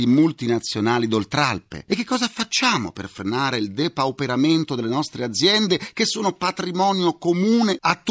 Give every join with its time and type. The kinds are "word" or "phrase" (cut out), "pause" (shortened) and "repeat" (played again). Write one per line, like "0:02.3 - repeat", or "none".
none